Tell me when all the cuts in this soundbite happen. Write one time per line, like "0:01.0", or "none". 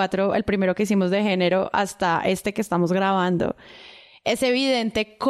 none